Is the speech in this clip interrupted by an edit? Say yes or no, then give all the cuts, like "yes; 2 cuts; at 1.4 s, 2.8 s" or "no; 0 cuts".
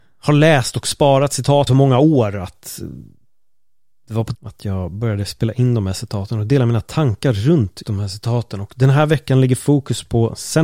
yes; 3 cuts; at 1.7 s, 4.3 s, 7.8 s